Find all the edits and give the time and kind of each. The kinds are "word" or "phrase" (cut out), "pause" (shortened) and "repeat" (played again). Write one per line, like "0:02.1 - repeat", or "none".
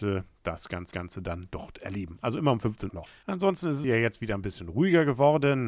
0:00.9 - repeat
0:02.9 - phrase
0:03.8 - phrase

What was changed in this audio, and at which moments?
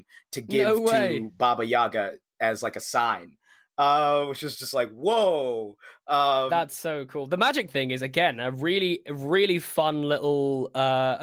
0:07.7 - word

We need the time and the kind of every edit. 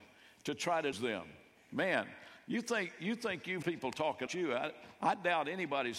0:00.9 - word
0:03.6 - word
0:04.3 - word

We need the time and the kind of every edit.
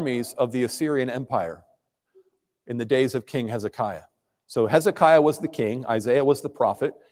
none

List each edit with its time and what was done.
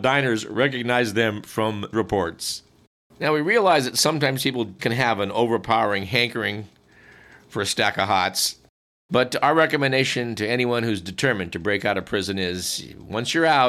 0:01.9 - word
0:04.8 - word

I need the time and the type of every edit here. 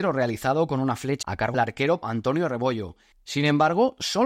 0:01.2 - word
0:01.5 - word
0:02.0 - word

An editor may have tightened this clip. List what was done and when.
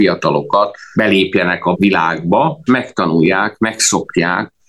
0:00.9 - word
0:01.7 - word
0:02.7 - word

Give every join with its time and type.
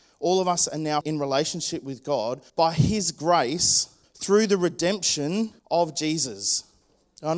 0:01.0 - word
0:02.5 - pause
0:04.0 - pause
0:05.6 - pause

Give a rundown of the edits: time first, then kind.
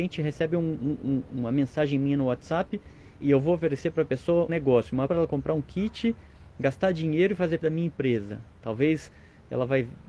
0:03.2 - word
0:04.5 - word
0:05.1 - word
0:07.6 - word

